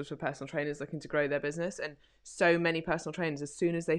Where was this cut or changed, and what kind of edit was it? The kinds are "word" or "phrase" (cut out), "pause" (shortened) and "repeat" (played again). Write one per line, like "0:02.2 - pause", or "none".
none